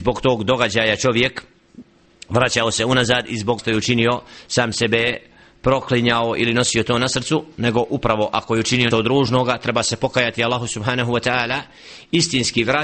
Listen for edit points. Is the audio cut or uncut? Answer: cut